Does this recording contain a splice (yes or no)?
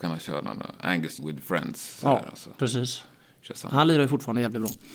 yes